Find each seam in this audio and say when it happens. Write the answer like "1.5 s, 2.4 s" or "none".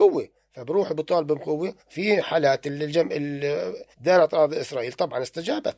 1.8 s, 3.9 s